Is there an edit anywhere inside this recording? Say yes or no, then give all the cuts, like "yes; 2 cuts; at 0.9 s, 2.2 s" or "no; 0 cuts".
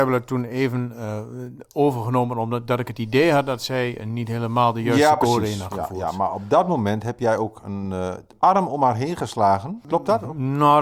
no; 0 cuts